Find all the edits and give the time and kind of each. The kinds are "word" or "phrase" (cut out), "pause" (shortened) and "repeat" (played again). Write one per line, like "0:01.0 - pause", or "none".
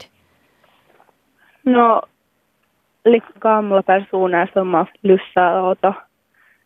0:03.4 - word
0:04.9 - word